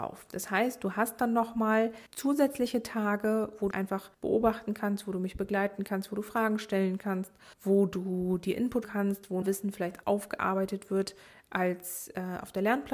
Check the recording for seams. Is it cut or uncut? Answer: cut